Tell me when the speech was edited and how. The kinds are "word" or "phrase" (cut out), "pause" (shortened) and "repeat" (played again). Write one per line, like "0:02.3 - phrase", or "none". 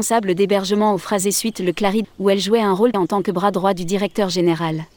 0:02.0 - word
0:02.9 - word

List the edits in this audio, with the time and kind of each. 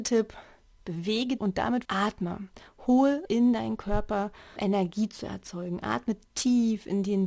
0:01.4 - word
0:01.8 - word
0:03.3 - word
0:04.6 - word

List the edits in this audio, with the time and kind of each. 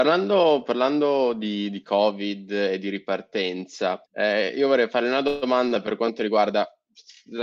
0:04.1 - pause

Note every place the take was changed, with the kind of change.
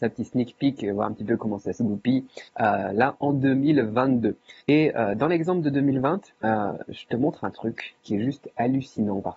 0:02.5 - pause
0:04.6 - pause
0:06.4 - pause
0:08.0 - pause

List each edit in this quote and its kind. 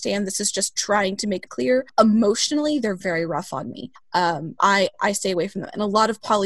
0:01.5 - word
0:03.0 - word
0:04.6 - word

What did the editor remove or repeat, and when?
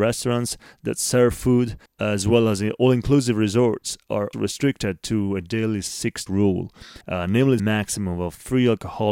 0:01.9 - pause
0:04.3 - word
0:06.3 - word
0:07.0 - pause
0:07.6 - phrase

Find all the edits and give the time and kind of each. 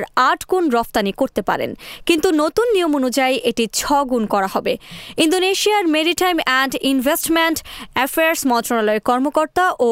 none

